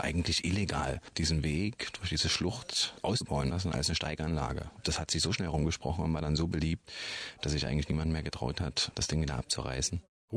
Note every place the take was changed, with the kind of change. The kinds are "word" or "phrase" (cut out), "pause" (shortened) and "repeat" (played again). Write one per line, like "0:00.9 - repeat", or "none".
none